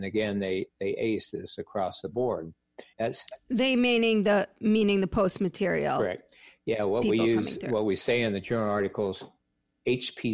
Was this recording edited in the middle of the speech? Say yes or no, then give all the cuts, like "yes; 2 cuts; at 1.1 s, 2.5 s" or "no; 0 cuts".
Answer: yes; 1 cut; at 2.9 s